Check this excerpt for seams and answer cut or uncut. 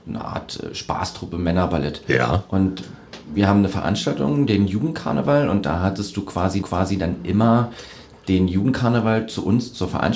cut